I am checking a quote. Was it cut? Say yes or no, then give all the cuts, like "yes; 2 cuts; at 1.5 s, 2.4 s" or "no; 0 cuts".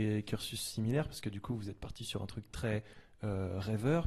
no; 0 cuts